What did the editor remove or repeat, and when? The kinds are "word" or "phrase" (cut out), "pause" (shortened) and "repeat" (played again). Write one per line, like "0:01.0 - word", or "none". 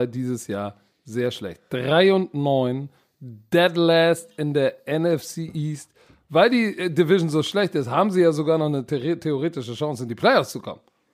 none